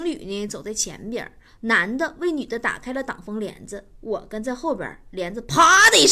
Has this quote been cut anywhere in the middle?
no; 0 cuts

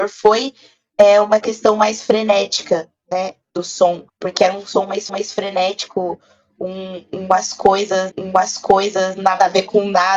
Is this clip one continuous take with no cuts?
no; 3 cuts; at 4.1 s, 5.1 s, 8.1 s

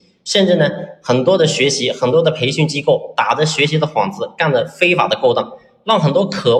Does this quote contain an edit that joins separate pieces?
no; 0 cuts

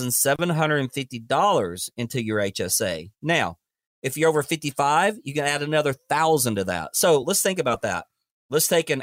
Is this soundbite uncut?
yes; 0 cuts

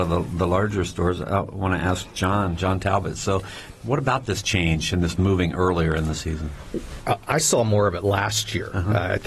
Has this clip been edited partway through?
no; 0 cuts

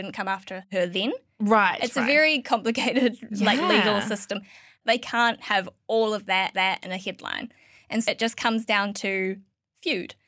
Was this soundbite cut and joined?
yes; 2 cuts; at 6.5 s, 8.0 s

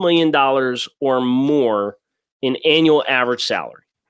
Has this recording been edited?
no; 0 cuts

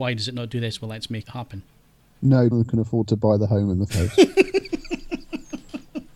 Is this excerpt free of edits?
no; 3 cuts; at 1.2 s, 2.5 s, 3.9 s

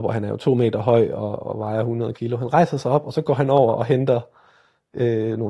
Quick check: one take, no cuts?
yes; 0 cuts

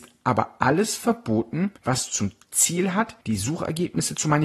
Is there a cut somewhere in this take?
yes; 2 cuts; at 1.8 s, 3.2 s

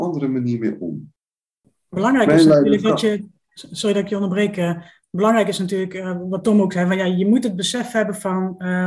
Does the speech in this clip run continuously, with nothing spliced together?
yes; 0 cuts

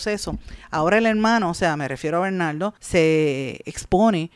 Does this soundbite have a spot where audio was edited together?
yes; 1 cut; at 2.8 s

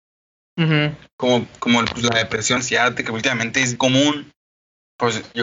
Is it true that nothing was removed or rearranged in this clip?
no; 2 cuts; at 2.6 s, 3.8 s

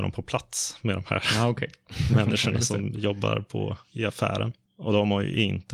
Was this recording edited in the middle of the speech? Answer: no; 0 cuts

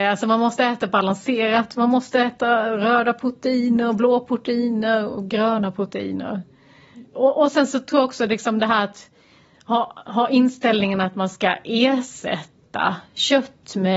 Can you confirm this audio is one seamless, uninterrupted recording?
yes; 0 cuts

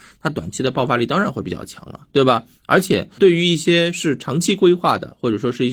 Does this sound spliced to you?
yes; 1 cut; at 3.2 s

